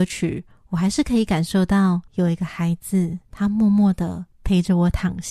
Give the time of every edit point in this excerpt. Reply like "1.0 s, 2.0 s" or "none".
2.1 s, 3.2 s